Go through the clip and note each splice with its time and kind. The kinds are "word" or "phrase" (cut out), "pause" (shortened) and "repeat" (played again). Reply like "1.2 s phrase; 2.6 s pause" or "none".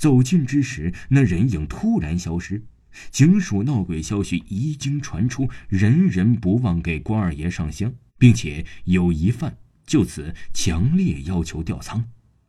8.1 s pause